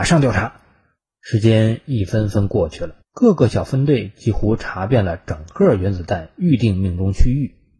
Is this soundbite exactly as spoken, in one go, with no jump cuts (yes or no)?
no